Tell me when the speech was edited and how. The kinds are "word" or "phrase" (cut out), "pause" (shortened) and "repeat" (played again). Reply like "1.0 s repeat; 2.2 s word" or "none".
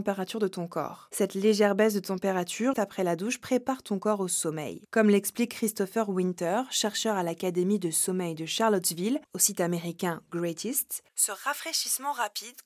2.7 s word